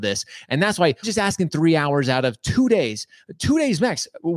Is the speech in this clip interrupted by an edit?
yes; 1 cut; at 1.0 s

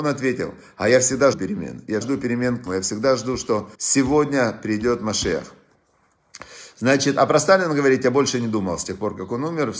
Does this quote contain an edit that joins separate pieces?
yes; 4 cuts; at 1.3 s, 2.0 s, 2.7 s, 3.7 s

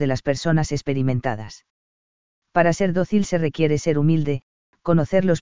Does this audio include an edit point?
no; 0 cuts

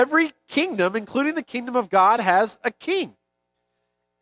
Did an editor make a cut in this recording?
no; 0 cuts

